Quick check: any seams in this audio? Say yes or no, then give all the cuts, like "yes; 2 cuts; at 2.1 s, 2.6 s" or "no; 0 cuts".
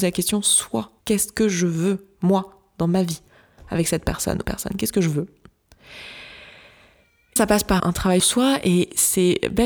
yes; 5 cuts; at 1.0 s, 4.4 s, 7.4 s, 7.8 s, 8.2 s